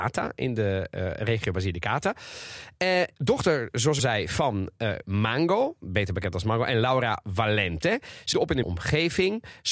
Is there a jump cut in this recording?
yes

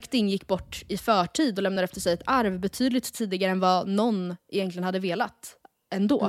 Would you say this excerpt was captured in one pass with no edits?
yes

